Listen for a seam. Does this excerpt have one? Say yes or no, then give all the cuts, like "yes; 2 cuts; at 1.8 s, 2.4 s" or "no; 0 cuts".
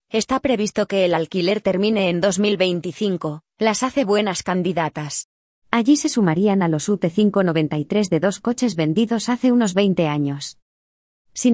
no; 0 cuts